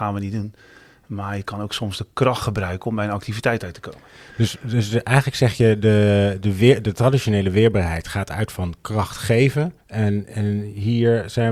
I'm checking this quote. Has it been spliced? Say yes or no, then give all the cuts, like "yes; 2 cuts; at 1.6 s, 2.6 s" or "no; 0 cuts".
yes; 1 cut; at 9.8 s